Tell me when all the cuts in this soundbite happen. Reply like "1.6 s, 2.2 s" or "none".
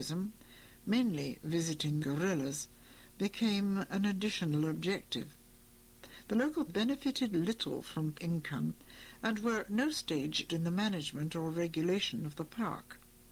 2.0 s, 6.7 s, 8.1 s, 9.7 s, 10.5 s